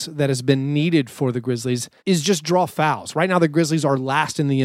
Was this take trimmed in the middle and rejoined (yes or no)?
yes